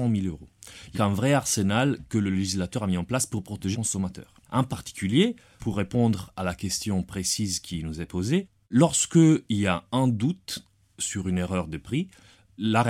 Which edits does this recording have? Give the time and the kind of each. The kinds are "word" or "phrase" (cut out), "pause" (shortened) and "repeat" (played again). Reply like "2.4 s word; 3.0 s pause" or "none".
0.9 s phrase; 3.7 s word

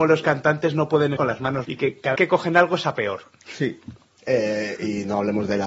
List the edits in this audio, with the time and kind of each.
1.2 s word; 1.6 s word; 2.1 s word

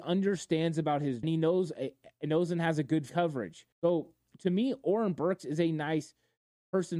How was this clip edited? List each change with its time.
1.2 s phrase; 3.1 s phrase; 3.7 s pause

